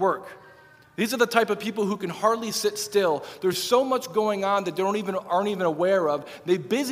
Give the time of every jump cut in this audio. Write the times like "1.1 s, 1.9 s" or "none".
none